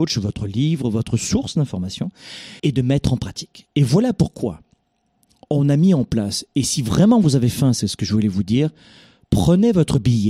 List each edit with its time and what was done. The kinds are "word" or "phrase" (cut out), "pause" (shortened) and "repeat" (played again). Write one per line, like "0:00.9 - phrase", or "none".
0:02.6 - pause